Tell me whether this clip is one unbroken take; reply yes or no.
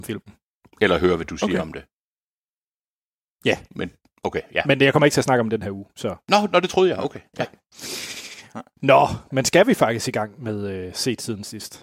yes